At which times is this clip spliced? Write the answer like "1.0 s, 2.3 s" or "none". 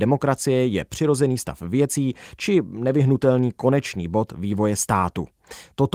none